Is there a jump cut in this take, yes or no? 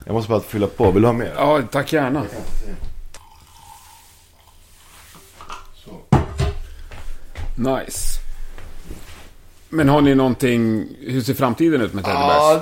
no